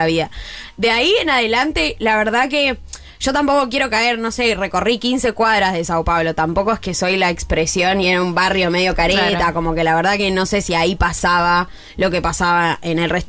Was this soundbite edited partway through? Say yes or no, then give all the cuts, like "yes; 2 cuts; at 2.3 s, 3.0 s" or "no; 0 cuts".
no; 0 cuts